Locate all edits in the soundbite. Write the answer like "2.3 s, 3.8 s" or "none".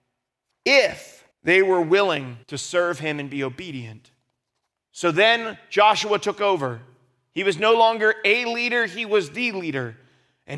1.3 s, 2.4 s, 4.7 s